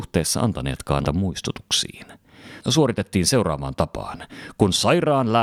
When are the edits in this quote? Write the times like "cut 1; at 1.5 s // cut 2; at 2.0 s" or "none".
cut 1; at 1.0 s // cut 2; at 2.6 s